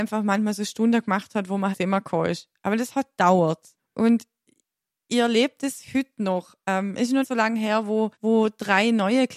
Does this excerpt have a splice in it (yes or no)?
yes